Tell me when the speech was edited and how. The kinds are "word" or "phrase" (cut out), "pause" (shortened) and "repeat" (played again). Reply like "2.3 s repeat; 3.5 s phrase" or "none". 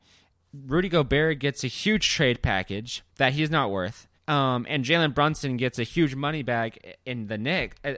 3.1 s pause; 4.2 s pause